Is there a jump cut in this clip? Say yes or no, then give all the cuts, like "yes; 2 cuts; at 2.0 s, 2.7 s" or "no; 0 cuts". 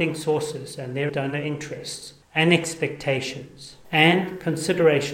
yes; 2 cuts; at 1.1 s, 2.2 s